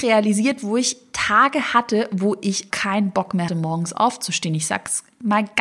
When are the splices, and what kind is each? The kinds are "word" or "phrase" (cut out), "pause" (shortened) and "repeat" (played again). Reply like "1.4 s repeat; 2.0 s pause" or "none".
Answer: 2.7 s word; 3.5 s word